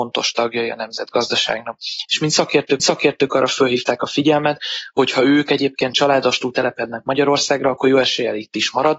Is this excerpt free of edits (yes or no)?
no